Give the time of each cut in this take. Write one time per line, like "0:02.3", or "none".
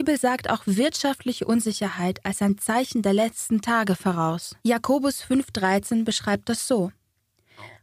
0:04.6